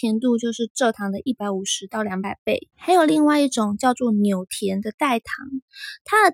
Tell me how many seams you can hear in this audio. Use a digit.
1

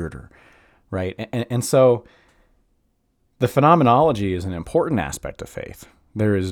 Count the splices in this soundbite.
0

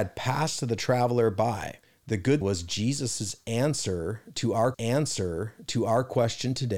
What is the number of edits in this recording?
3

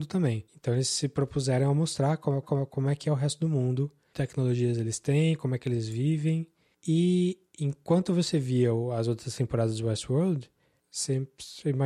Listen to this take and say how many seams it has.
2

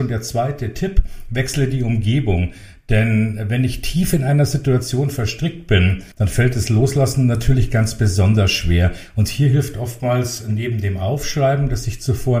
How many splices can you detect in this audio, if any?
1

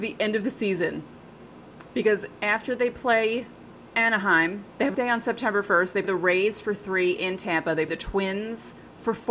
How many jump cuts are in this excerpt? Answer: 3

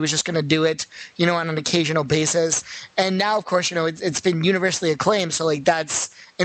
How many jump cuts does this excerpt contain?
0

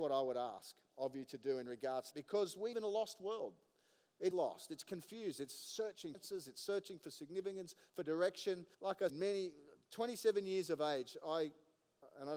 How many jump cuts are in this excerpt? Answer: 6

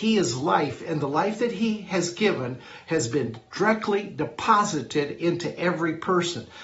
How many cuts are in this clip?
0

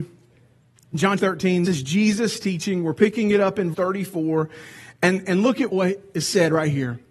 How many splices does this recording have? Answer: 4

